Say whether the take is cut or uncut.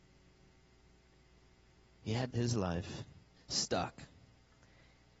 cut